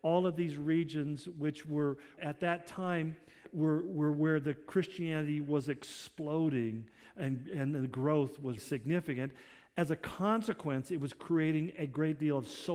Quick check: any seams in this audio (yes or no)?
yes